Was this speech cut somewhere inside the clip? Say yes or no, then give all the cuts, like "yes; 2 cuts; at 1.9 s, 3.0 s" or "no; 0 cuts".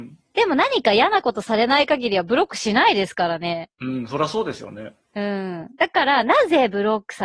yes; 1 cut; at 3.7 s